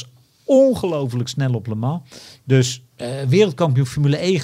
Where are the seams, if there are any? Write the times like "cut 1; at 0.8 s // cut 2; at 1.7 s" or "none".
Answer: none

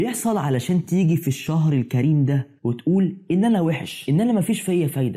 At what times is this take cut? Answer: cut 1; at 2.6 s

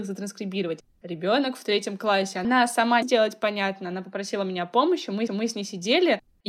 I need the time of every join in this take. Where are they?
cut 1; at 3.0 s // cut 2; at 5.3 s

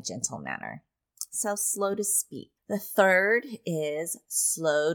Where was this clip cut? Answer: cut 1; at 2.6 s

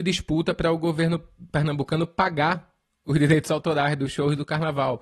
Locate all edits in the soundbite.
none

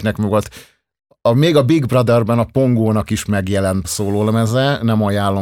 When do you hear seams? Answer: cut 1; at 3.8 s

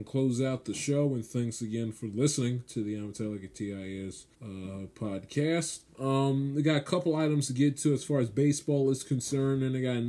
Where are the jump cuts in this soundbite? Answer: cut 1; at 4.3 s // cut 2; at 5.9 s

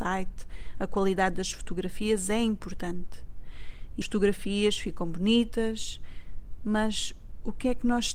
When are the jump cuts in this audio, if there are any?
cut 1; at 4.0 s

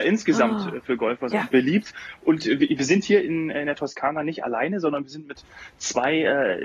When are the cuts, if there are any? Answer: cut 1; at 1.3 s

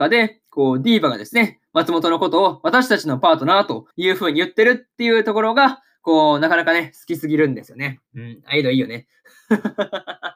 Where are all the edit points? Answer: cut 1; at 3.9 s

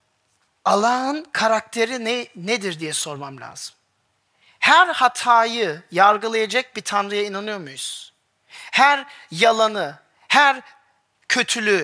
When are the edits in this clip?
cut 1; at 4.1 s

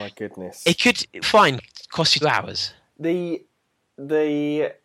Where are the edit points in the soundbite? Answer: cut 1; at 1.2 s // cut 2; at 2.2 s

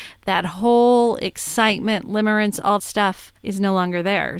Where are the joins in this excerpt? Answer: cut 1; at 2.8 s // cut 2; at 3.4 s

